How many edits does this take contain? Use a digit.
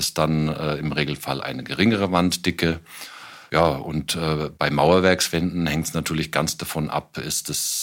0